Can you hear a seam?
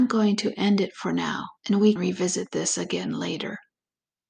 yes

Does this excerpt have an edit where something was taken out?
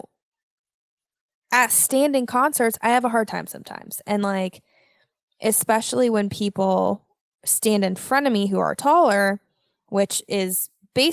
no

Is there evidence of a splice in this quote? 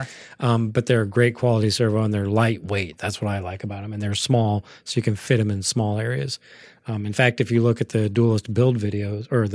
no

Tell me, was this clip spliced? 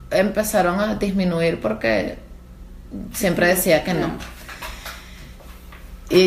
no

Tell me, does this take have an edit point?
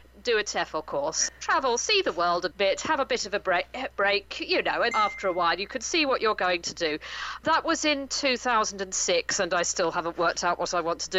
yes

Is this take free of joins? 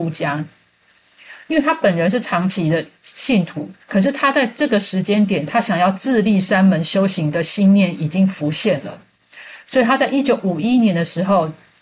no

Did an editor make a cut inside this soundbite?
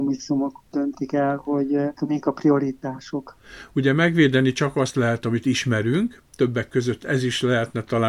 yes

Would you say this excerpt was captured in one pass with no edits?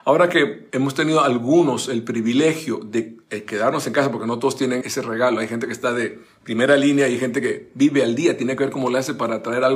no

